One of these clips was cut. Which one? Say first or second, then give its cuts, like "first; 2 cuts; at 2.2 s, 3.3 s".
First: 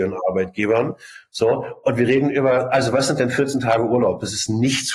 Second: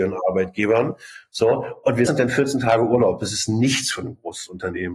second; 1 cut; at 2.1 s